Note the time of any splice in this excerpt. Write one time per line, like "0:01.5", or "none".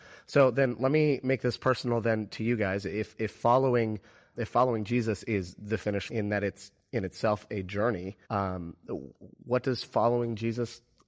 0:04.3
0:06.1
0:08.2